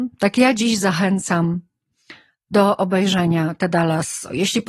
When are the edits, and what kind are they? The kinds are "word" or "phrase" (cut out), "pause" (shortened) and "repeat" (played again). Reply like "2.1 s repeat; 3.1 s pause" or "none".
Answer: none